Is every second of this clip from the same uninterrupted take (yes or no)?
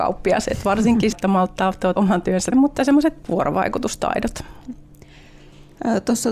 no